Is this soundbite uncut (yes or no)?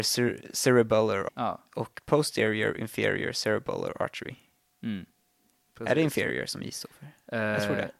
no